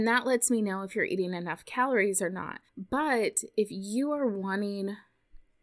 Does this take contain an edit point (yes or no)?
yes